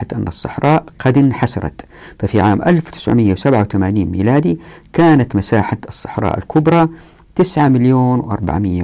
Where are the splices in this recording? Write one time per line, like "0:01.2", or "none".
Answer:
none